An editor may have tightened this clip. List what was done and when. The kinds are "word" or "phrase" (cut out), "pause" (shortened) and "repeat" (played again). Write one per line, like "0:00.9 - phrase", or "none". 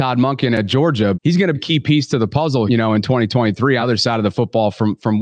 0:01.1 - word
0:01.5 - word
0:02.7 - word
0:03.8 - word